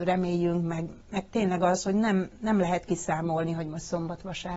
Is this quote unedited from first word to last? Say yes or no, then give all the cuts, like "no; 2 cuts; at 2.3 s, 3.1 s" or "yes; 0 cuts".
yes; 0 cuts